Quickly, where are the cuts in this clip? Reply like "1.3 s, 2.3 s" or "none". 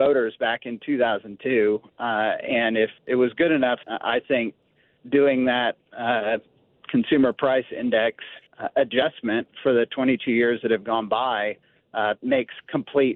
3.0 s, 3.8 s, 8.5 s